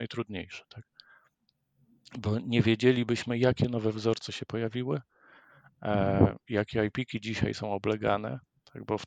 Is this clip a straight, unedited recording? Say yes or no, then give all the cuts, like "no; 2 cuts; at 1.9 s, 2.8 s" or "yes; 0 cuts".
yes; 0 cuts